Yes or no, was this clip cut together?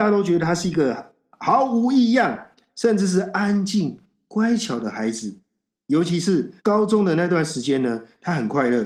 yes